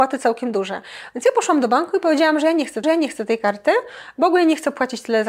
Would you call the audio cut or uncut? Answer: cut